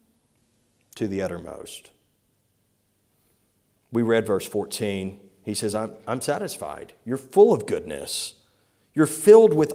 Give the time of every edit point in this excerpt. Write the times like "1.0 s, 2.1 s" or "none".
none